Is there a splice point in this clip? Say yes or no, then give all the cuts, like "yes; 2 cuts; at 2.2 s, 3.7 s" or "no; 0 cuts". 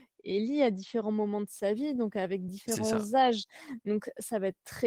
no; 0 cuts